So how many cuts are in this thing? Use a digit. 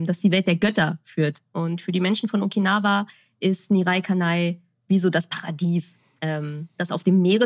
0